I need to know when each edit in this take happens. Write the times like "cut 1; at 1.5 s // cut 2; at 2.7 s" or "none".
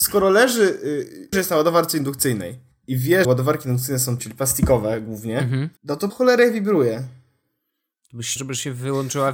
cut 1; at 1.3 s // cut 2; at 2.7 s // cut 3; at 3.2 s // cut 4; at 4.2 s // cut 5; at 5.8 s // cut 6; at 6.1 s // cut 7; at 8.4 s